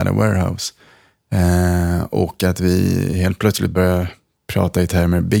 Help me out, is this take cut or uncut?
uncut